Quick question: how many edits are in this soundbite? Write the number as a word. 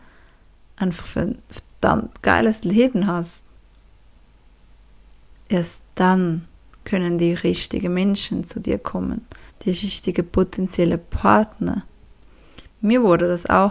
two